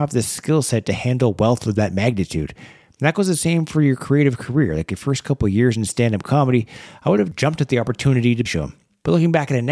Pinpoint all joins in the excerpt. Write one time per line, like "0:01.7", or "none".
0:08.5

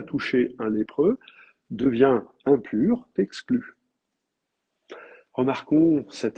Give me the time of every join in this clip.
0:02.4
0:03.2

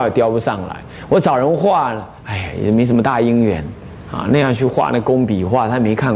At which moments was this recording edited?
0:02.2

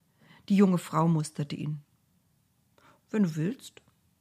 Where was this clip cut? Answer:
none

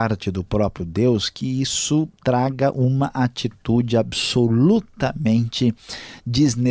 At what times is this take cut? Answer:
none

